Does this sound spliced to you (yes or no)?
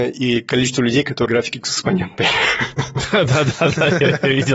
yes